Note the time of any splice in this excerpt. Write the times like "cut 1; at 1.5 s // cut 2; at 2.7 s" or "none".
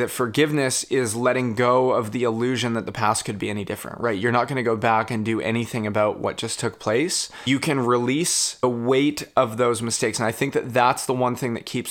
none